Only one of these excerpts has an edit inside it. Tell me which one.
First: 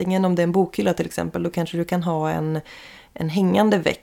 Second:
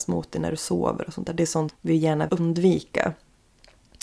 second; 2 cuts; at 1.7 s, 2.3 s

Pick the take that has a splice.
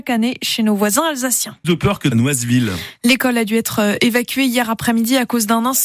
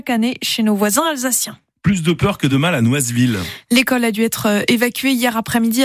first; 2 cuts; at 1.6 s, 2.1 s

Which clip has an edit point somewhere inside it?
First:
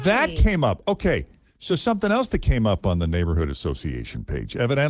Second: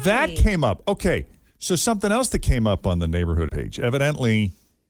second; 1 cut; at 3.5 s

